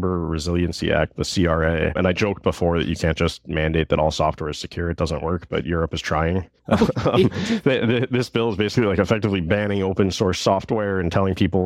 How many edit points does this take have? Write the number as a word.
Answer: one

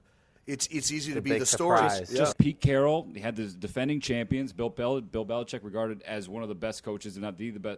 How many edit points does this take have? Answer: one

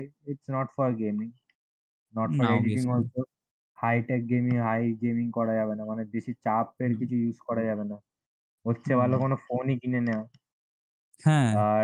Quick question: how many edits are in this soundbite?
one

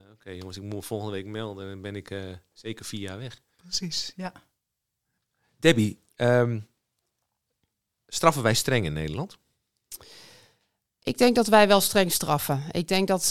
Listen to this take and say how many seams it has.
zero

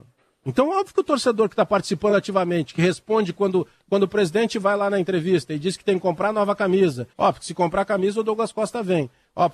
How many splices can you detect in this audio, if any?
one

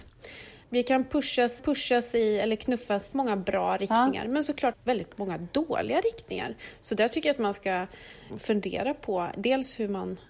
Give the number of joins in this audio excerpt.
four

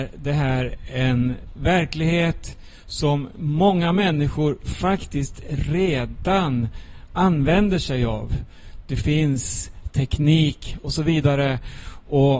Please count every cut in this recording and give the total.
zero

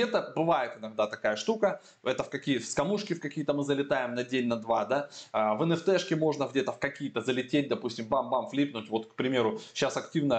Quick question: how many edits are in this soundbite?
zero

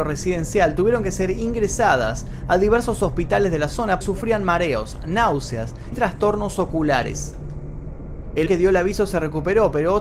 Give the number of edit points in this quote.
three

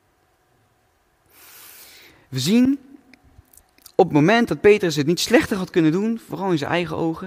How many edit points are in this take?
zero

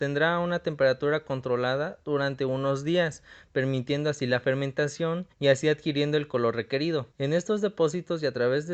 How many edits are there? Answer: two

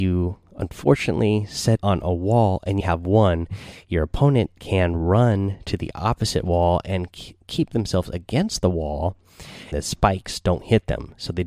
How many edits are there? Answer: four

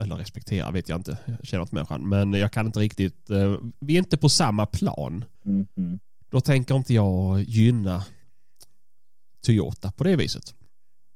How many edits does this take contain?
one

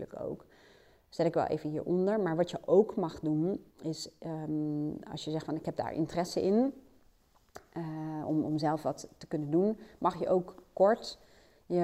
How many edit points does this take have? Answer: one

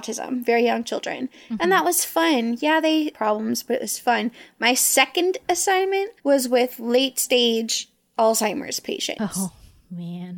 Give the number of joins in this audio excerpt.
two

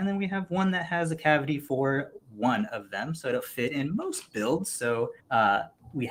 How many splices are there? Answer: one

